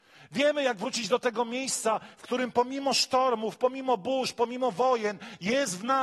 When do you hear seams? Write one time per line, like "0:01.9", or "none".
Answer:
none